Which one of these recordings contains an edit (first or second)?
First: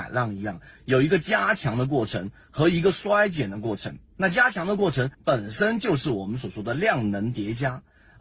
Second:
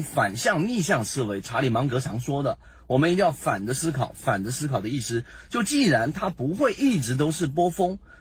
first